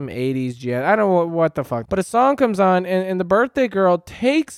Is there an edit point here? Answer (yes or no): yes